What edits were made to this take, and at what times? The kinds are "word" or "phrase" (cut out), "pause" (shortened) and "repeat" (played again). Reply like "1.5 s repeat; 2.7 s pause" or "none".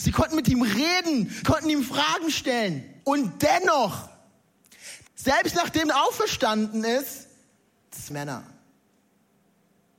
1.4 s word; 3.0 s pause; 5.1 s pause; 5.8 s phrase; 8.1 s phrase

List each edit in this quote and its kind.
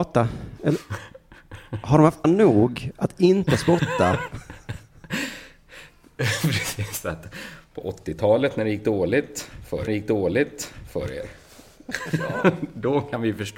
2.2 s word; 9.9 s repeat

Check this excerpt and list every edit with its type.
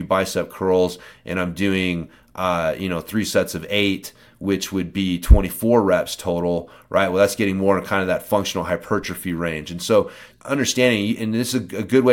10.3 s word

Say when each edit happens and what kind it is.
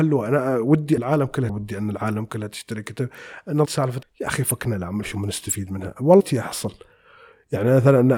1.0 s word; 1.5 s word; 3.7 s word; 4.0 s word; 5.0 s word; 6.2 s word

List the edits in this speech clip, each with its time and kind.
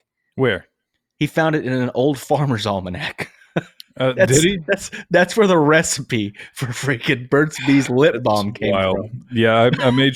none

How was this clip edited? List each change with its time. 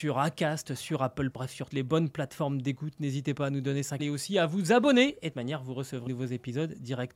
1.3 s word; 1.7 s word; 4.0 s word; 5.3 s word; 6.1 s word

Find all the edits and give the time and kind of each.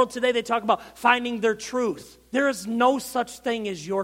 2.3 s pause

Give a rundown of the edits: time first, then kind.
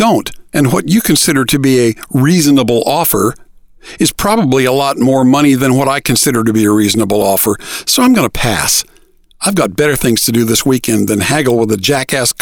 none

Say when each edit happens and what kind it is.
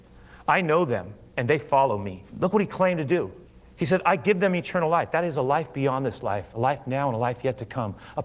2.3 s pause; 3.4 s pause

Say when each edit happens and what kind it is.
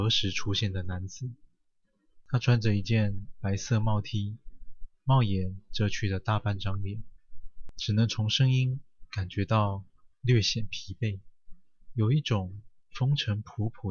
none

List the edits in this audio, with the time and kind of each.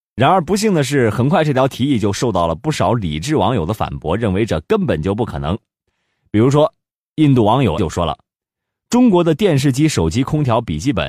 7.8 s word

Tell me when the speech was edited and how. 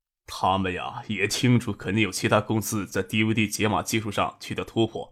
none

